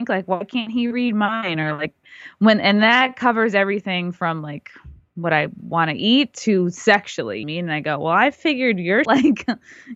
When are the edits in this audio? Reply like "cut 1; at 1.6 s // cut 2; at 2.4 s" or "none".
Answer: cut 1; at 7.4 s // cut 2; at 9.0 s